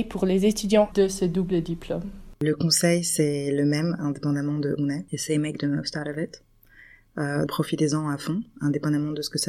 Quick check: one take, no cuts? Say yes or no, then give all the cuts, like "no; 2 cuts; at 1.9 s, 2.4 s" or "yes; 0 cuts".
no; 3 cuts; at 0.9 s, 4.8 s, 7.5 s